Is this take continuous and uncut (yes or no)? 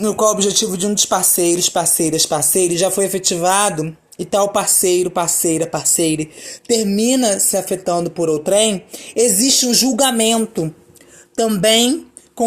yes